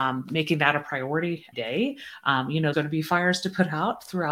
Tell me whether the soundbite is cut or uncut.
cut